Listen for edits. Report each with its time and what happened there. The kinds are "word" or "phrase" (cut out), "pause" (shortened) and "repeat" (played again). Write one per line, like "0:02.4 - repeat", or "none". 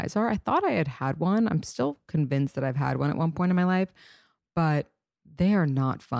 none